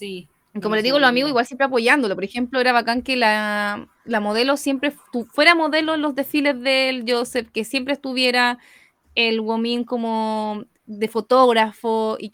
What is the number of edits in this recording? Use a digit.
0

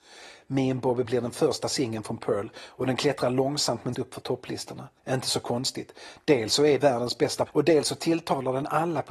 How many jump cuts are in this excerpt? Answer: 5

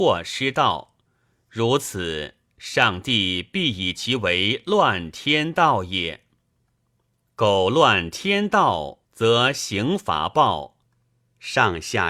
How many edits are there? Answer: 1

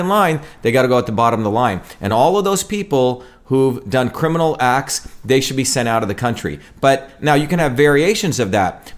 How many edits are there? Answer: 0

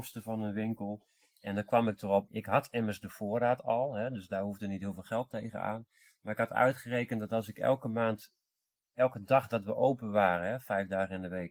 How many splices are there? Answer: 1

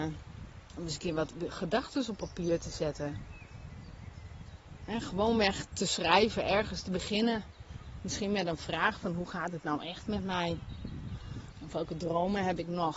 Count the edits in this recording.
0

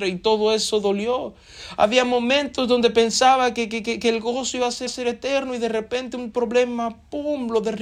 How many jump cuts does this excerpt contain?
1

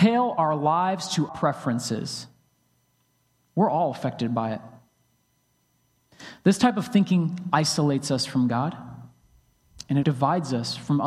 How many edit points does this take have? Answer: 2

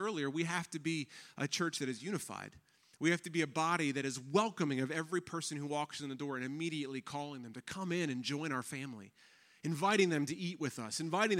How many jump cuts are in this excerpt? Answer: 0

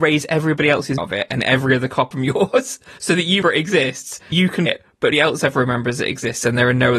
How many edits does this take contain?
6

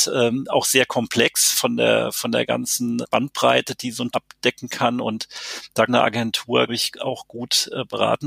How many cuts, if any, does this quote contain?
5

